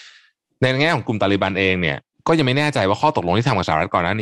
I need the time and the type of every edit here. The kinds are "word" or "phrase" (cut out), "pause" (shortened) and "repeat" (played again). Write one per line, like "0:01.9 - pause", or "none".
0:02.1 - pause